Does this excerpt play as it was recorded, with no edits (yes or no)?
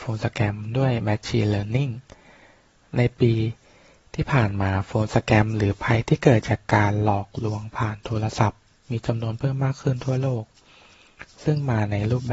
yes